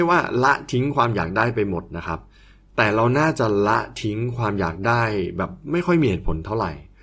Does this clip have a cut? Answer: no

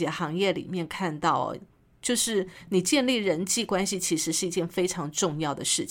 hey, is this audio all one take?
yes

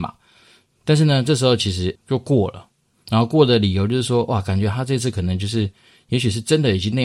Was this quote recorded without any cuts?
no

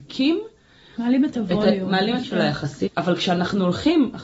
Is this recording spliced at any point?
yes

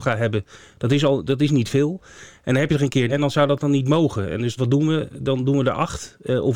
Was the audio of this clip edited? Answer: yes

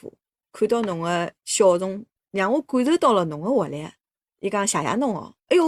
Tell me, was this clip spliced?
no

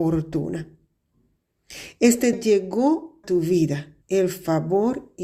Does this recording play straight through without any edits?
no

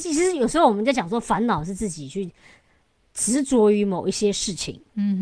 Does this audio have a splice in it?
no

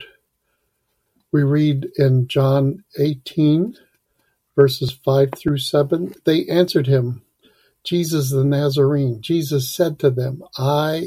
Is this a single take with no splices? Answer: yes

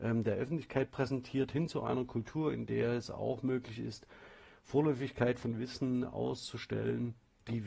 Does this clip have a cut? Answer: no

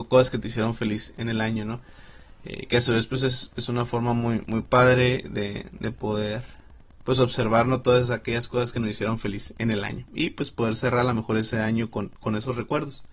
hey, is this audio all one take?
yes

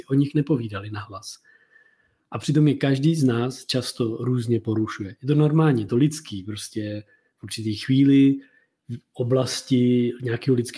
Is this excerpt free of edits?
yes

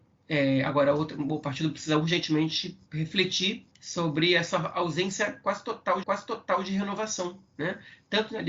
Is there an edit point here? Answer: yes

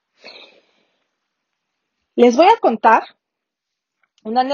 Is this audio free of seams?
yes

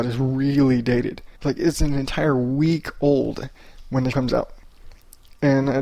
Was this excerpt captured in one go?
no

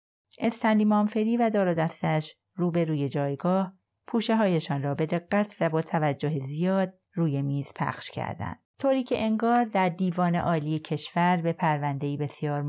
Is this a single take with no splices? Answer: no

